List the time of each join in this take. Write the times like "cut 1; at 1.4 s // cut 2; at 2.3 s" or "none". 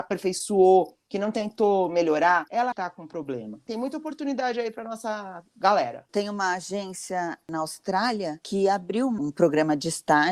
cut 1; at 2.7 s